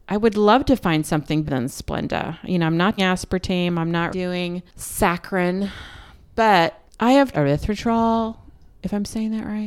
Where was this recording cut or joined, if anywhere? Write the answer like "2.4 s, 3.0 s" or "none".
1.5 s, 3.0 s, 4.1 s, 7.3 s